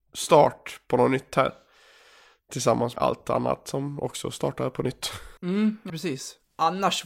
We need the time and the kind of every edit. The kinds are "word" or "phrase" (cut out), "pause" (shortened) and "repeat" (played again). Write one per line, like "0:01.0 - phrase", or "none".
0:03.0 - word
0:05.4 - pause
0:05.9 - word